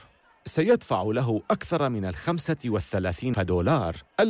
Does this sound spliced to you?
yes; 1 cut; at 3.3 s

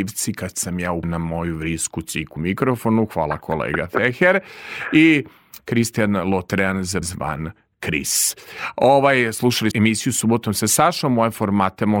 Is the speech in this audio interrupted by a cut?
yes; 4 cuts; at 1.0 s, 2.4 s, 7.0 s, 9.7 s

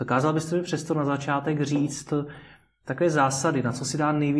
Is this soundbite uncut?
yes; 0 cuts

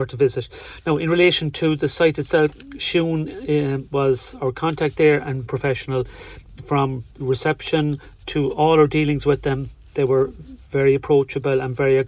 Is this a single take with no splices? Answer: no; 2 cuts; at 5.5 s, 7.1 s

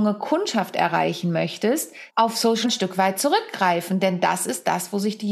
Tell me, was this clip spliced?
yes; 2 cuts; at 2.1 s, 2.6 s

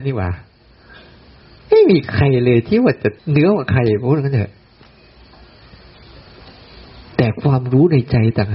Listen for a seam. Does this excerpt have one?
yes; 1 cut; at 3.2 s

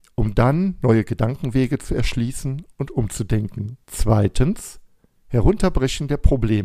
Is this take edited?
yes; 1 cut; at 3.8 s

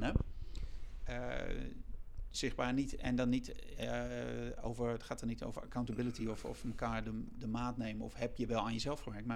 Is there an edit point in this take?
no; 0 cuts

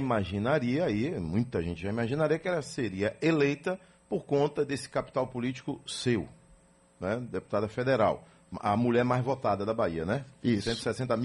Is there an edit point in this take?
no; 0 cuts

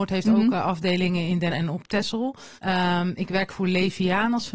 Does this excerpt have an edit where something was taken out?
yes; 3 cuts; at 1.5 s, 2.6 s, 3.5 s

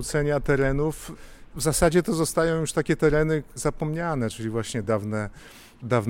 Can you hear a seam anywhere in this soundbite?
no; 0 cuts

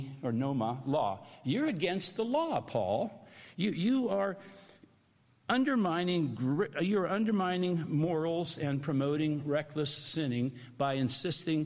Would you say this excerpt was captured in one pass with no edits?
yes; 0 cuts

